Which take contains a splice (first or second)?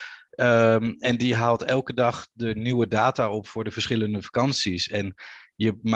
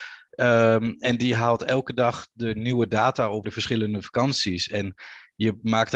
second